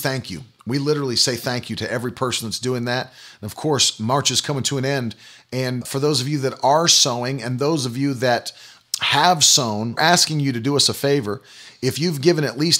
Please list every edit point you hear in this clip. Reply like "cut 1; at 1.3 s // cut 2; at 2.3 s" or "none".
cut 1; at 5.8 s // cut 2; at 8.8 s // cut 3; at 10.0 s